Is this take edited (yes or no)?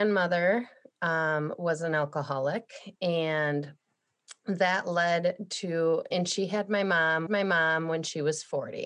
yes